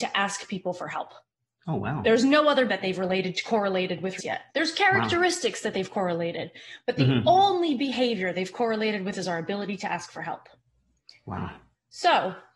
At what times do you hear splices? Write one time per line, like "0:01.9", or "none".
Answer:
0:02.7
0:04.2
0:04.5
0:09.1